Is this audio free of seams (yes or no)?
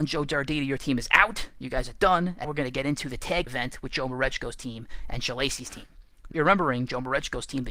no